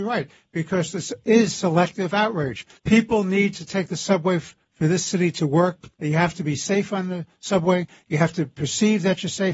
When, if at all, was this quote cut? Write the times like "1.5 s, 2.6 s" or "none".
2.7 s, 5.9 s